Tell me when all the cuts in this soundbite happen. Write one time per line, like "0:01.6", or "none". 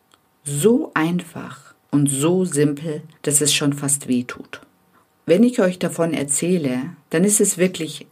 0:03.1
0:04.9
0:07.0